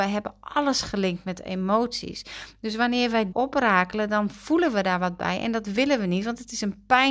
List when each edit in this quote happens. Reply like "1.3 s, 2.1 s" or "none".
3.3 s

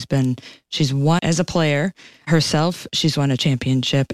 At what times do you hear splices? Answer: 1.2 s

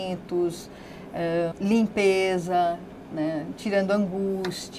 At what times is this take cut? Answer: 1.5 s

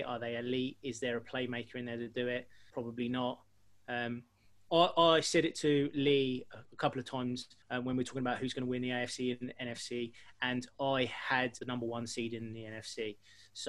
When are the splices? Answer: 2.7 s, 4.7 s, 7.6 s, 11.6 s

